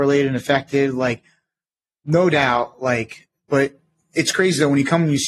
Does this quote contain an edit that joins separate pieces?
no; 0 cuts

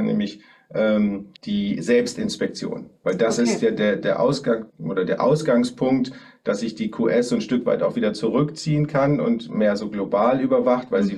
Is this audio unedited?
no; 2 cuts; at 1.4 s, 4.7 s

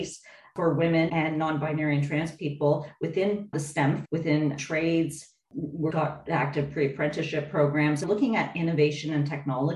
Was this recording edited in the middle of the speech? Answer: yes; 6 cuts; at 1.1 s, 3.5 s, 4.0 s, 4.6 s, 5.9 s, 8.0 s

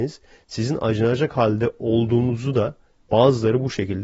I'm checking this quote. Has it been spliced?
no; 0 cuts

